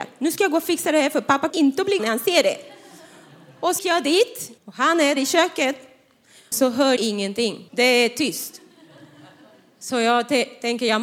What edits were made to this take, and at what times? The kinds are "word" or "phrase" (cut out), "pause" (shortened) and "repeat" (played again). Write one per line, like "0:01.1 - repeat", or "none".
0:01.5 - word
0:02.0 - word
0:03.8 - word
0:04.6 - pause
0:05.2 - word
0:06.5 - word
0:07.0 - word
0:07.7 - pause